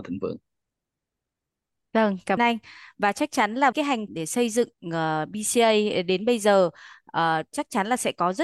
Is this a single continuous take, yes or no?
no